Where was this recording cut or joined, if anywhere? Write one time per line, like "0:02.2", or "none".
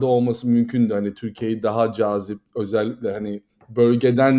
none